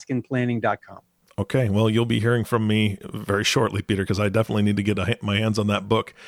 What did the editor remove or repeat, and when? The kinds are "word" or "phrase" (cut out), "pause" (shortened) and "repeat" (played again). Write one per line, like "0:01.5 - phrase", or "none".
none